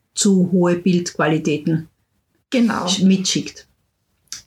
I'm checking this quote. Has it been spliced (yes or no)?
no